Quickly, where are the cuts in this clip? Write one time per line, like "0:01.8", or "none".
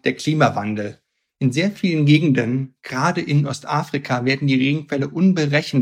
none